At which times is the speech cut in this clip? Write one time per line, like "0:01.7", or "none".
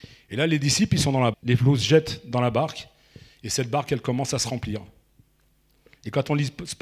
0:01.3

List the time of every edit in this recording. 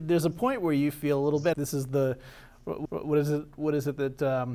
0:01.5
0:02.9

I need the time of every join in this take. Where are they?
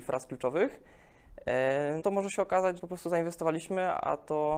0:02.0
0:02.8

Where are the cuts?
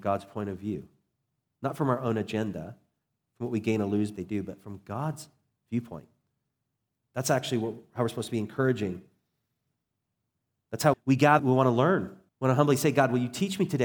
0:04.2
0:10.9
0:11.4
0:12.3

